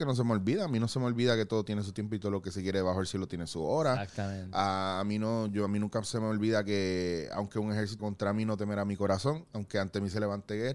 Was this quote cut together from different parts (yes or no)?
yes